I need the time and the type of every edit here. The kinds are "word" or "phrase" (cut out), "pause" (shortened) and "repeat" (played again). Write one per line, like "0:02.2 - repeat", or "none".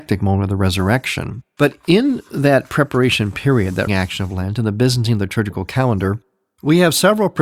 0:03.9 - word